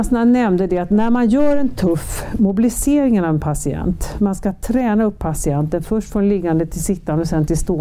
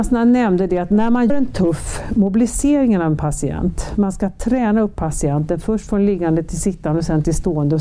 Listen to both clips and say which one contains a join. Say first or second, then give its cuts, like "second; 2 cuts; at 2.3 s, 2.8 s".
second; 1 cut; at 1.3 s